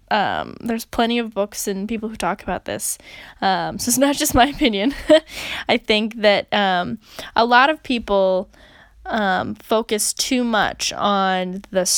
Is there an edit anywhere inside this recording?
no; 0 cuts

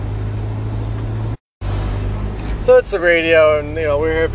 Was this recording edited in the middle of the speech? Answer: no; 0 cuts

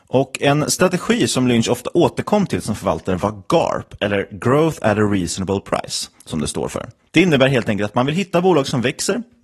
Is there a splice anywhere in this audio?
no; 0 cuts

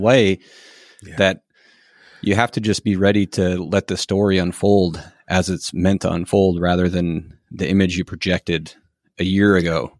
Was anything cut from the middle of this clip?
no; 0 cuts

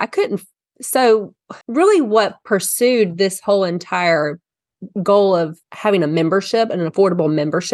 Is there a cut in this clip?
yes; 2 cuts; at 1.6 s, 5.6 s

